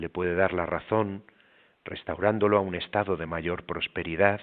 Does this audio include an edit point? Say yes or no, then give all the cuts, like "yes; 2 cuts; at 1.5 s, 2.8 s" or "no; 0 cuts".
no; 0 cuts